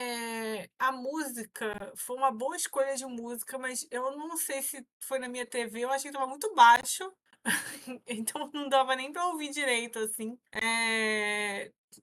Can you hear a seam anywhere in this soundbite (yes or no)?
yes